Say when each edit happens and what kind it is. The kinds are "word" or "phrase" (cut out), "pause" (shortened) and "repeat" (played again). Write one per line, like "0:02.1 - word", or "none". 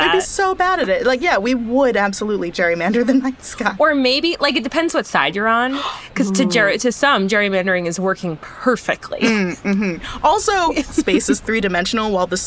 none